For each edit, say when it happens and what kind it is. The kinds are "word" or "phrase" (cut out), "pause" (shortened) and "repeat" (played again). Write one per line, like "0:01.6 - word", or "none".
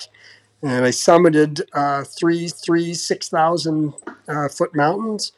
0:02.5 - repeat